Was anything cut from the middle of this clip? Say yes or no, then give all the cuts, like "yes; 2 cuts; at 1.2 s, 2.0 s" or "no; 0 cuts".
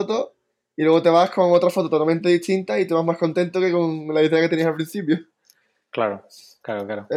no; 0 cuts